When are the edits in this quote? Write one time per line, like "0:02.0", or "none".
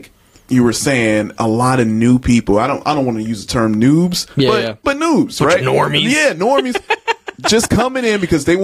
none